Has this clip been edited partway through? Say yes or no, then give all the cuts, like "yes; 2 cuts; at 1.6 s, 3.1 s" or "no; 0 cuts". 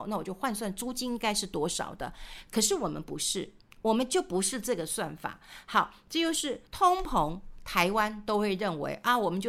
yes; 1 cut; at 6.7 s